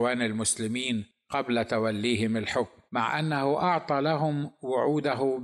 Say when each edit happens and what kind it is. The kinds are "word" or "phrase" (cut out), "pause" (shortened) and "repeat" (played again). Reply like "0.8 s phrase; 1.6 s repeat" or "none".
2.9 s pause

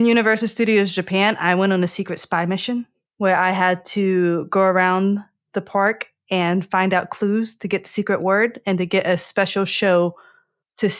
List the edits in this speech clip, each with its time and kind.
none

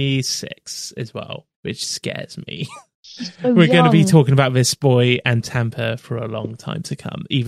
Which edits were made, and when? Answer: 1.5 s pause

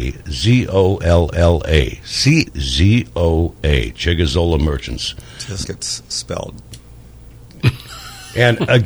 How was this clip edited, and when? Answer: 1.3 s repeat; 2.5 s phrase; 3.6 s word; 5.6 s word

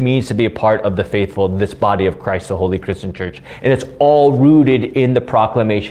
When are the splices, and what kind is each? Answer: none

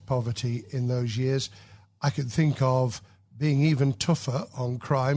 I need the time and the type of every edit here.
none

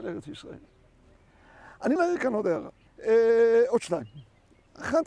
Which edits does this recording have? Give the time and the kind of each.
2.0 s word; 2.9 s pause

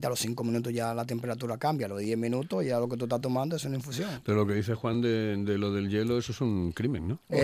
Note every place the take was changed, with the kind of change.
none

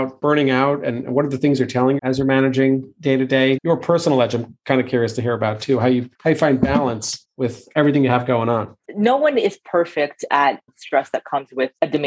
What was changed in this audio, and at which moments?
2.0 s word; 3.6 s word; 8.8 s pause; 10.7 s phrase

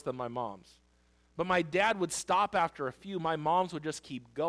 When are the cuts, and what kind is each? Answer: none

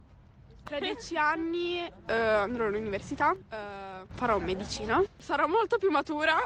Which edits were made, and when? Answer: none

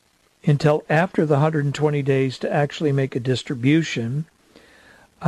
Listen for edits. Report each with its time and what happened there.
none

